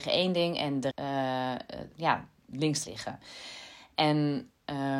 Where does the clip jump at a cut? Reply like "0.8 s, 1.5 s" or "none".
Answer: 0.9 s, 1.9 s, 2.8 s